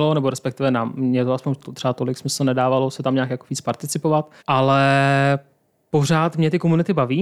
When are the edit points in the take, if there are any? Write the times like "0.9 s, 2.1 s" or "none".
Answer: 4.4 s